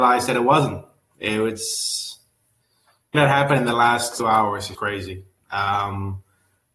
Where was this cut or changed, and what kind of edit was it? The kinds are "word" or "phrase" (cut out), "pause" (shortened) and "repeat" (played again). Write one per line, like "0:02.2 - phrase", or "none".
0:03.1 - word
0:04.2 - word
0:04.7 - word